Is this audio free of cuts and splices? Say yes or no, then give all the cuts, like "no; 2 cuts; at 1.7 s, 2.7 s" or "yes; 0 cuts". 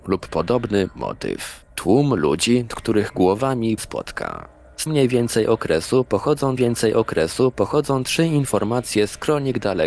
no; 4 cuts; at 2.7 s, 3.8 s, 4.9 s, 6.6 s